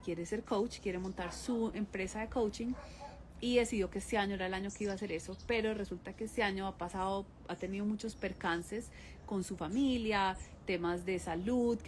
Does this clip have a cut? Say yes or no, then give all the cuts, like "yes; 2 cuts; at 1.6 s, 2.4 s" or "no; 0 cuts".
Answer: no; 0 cuts